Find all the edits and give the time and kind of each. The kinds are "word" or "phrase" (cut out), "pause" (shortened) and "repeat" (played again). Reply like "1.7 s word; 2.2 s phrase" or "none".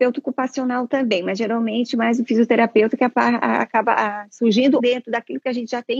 4.8 s word